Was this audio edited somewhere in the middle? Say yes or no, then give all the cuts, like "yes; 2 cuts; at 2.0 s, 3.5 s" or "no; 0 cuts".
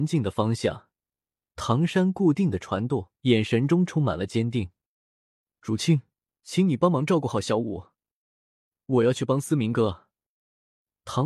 yes; 2 cuts; at 3.2 s, 6.3 s